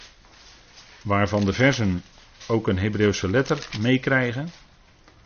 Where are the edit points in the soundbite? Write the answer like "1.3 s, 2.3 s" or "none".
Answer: none

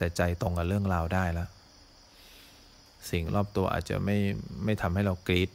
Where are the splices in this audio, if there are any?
none

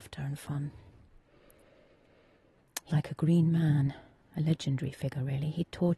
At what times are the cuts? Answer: 2.9 s

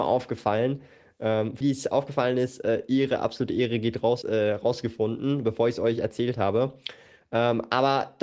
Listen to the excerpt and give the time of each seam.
1.6 s, 4.2 s

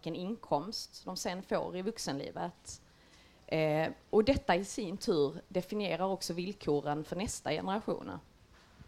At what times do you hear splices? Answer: none

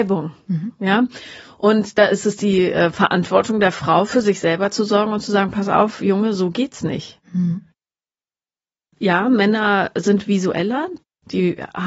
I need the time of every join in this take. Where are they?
none

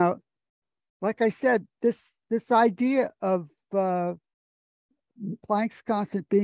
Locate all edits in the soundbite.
5.4 s

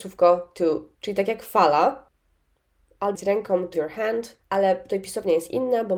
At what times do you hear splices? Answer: 0.9 s, 3.1 s, 3.7 s, 4.4 s

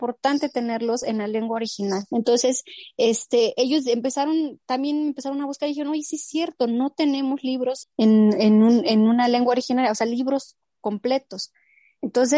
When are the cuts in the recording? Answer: 7.8 s

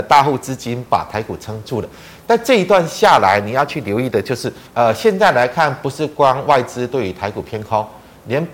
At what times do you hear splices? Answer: 4.7 s

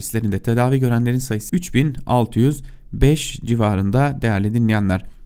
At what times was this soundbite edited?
1.5 s

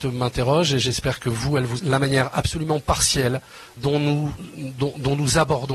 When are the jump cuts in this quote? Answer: 1.8 s, 3.8 s

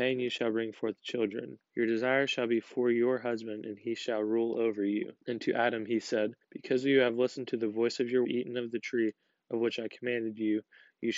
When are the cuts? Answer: 1.7 s, 5.2 s, 6.4 s, 8.2 s

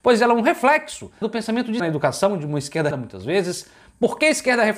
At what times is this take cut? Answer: 1.2 s, 1.8 s, 2.9 s

